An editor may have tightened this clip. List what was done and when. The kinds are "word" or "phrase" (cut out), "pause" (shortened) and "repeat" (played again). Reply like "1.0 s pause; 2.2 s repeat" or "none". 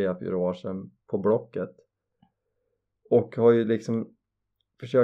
none